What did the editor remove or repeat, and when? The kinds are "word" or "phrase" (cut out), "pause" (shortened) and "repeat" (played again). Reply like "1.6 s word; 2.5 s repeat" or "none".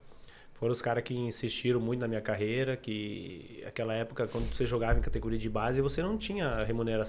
none